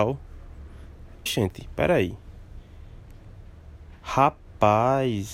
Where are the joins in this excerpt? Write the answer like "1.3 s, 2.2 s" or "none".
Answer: 1.3 s